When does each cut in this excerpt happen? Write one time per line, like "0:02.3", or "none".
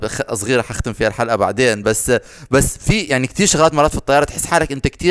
none